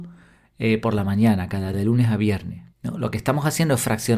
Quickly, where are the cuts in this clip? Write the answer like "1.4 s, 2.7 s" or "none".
1.7 s, 2.7 s

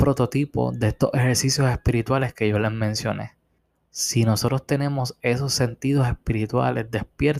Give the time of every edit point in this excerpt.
3.6 s

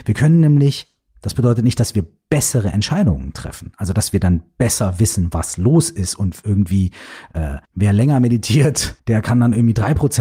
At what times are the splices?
7.6 s, 9.0 s

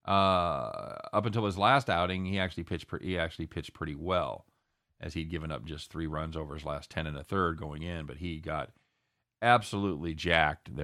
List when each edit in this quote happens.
none

